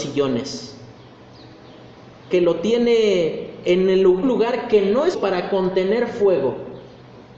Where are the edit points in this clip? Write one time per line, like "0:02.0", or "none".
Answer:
0:02.3
0:04.2
0:05.1